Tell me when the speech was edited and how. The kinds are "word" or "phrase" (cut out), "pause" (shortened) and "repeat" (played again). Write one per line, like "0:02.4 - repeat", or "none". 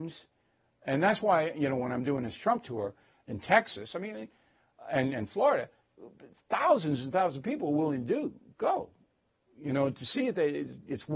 none